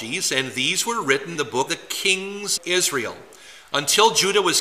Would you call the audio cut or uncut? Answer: cut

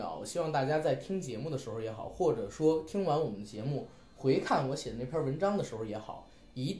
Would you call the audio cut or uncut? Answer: uncut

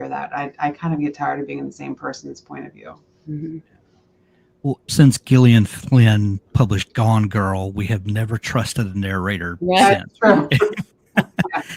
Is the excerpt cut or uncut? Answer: cut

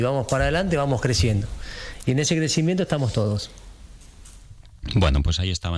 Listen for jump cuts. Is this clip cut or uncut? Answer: uncut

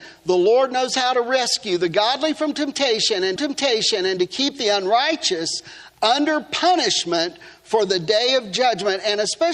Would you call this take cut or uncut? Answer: cut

